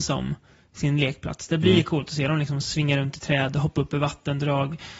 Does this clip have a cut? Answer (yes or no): no